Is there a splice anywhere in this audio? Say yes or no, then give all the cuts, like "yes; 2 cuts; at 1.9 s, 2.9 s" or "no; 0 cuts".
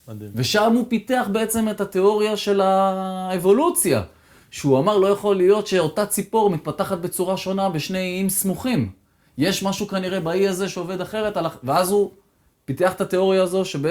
no; 0 cuts